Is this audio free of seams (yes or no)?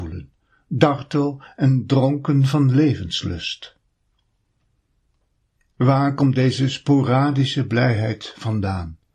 yes